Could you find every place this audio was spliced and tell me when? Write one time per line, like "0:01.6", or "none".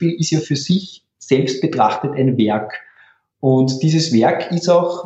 none